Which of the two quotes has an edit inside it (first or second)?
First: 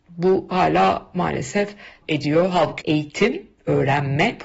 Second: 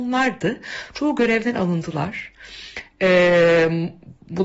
first